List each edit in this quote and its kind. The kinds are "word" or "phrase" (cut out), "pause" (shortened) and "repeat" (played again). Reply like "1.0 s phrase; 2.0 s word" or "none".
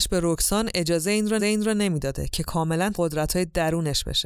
1.4 s repeat; 2.9 s word